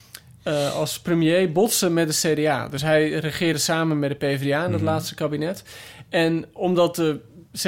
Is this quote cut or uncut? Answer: uncut